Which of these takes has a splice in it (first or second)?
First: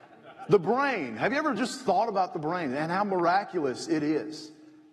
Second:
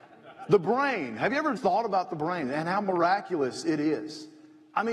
second